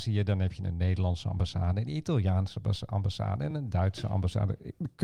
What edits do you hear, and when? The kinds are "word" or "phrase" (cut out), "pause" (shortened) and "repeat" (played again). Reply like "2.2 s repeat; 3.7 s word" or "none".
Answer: none